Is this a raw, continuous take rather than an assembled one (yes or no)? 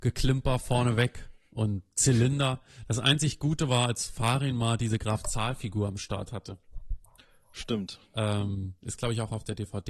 yes